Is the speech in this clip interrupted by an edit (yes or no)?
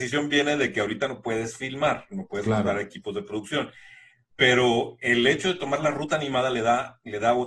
no